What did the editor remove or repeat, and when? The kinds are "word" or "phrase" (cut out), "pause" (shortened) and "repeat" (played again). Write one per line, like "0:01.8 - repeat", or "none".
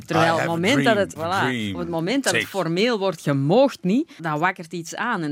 0:01.2 - word
0:03.2 - word
0:04.2 - word

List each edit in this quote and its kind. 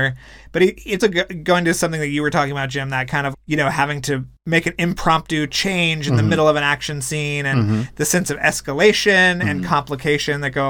0:01.0 - word
0:03.3 - word

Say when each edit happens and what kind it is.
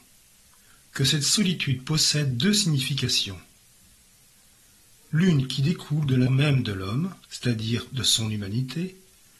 0:06.3 - word
0:07.2 - pause

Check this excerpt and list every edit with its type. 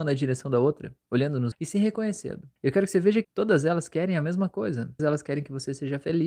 0:01.5 - word
0:02.6 - pause
0:03.2 - phrase
0:05.0 - word

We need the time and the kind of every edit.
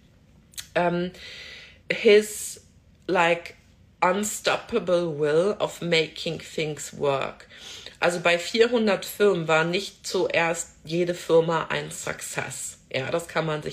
0:01.8 - word

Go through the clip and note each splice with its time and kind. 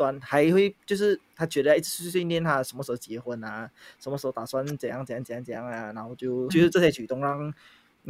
0:06.5 - word

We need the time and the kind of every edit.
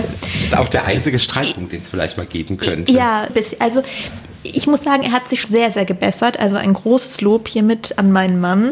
0:03.3 - word
0:05.4 - word

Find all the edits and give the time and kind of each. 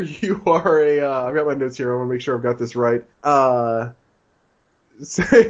0:03.1 - pause

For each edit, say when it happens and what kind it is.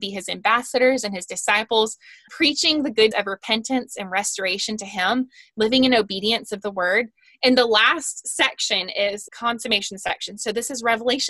0:02.3 - word
0:03.1 - word
0:09.3 - word

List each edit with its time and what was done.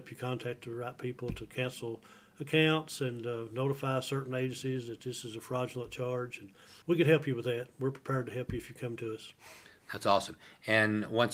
0:06.8 - pause

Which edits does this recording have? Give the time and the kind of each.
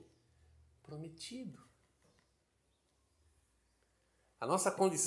none

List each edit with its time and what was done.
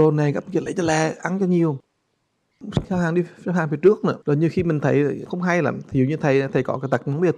0:02.8 - word
0:04.2 - pause

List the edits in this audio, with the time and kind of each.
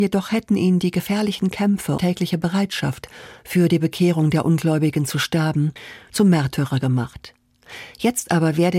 0:02.0 - phrase

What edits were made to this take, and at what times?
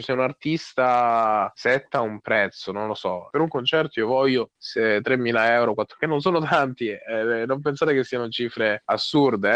0:03.3 - word

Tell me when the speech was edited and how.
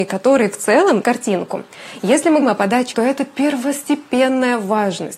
0:01.0 - word
0:02.4 - word
0:02.9 - phrase

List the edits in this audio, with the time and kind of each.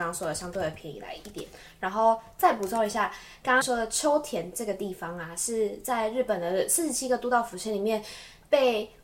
0:03.6 - word

